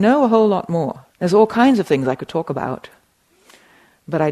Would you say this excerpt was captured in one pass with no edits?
no; 1 cut; at 1.1 s

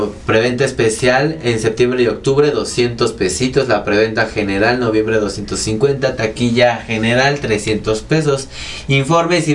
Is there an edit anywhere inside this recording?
no; 0 cuts

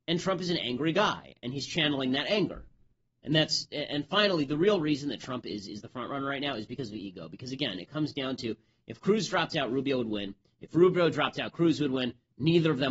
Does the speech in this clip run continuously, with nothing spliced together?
yes; 0 cuts

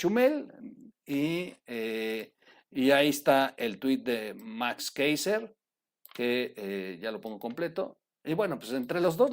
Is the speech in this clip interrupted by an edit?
no; 0 cuts

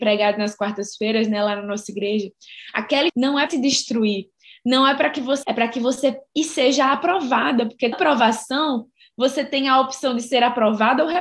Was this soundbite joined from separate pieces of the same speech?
yes; 5 cuts; at 3.1 s, 3.5 s, 5.4 s, 6.3 s, 7.9 s

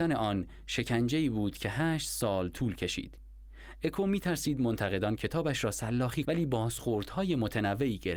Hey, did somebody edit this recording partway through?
yes; 1 cut; at 6.2 s

